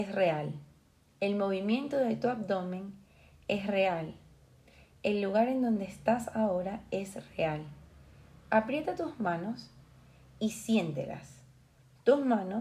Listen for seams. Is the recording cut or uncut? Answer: uncut